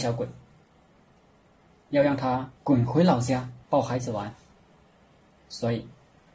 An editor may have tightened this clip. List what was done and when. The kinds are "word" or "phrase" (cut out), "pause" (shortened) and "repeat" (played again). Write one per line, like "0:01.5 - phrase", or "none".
0:02.6 - pause
0:03.6 - pause